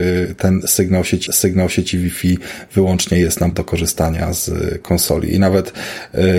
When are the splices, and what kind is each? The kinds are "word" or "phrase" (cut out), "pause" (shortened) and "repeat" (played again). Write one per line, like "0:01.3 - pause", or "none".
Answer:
0:01.3 - repeat
0:03.5 - word